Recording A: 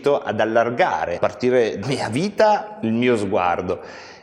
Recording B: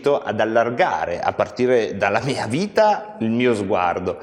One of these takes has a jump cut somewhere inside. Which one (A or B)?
A